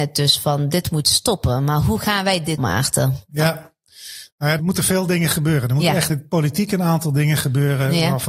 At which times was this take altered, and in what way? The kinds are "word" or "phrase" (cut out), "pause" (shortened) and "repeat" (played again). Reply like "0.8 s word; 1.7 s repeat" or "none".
2.6 s word; 4.6 s word; 6.1 s word